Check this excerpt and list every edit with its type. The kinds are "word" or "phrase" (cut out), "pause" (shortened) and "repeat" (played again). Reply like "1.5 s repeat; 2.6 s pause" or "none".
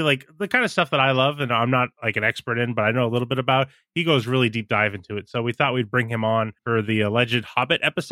6.6 s pause